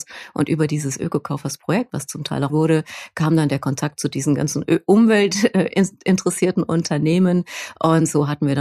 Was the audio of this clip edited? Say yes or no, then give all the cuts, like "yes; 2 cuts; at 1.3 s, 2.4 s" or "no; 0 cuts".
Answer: yes; 1 cut; at 2.5 s